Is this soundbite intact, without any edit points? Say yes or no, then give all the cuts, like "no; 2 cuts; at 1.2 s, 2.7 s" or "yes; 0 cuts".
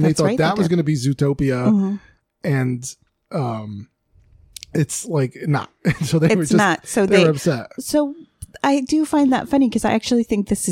no; 1 cut; at 7.8 s